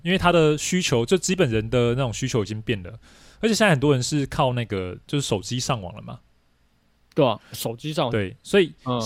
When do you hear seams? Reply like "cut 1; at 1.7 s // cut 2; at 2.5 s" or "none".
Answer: none